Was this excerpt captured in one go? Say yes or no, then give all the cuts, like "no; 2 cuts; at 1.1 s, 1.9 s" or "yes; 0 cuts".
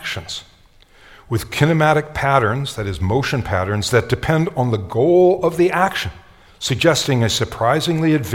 yes; 0 cuts